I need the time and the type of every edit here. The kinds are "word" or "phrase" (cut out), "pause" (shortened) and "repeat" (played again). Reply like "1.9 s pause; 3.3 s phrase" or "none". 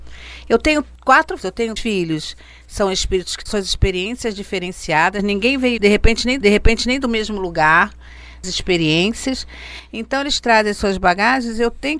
1.4 s word; 1.8 s word; 3.5 s phrase; 5.8 s word; 6.4 s repeat; 8.4 s phrase